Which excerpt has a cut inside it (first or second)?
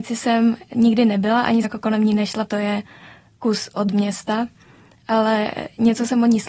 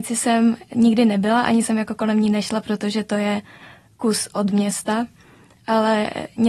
first